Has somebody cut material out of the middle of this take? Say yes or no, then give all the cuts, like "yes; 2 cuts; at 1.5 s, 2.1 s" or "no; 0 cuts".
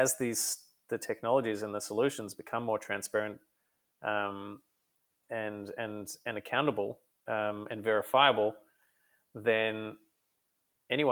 no; 0 cuts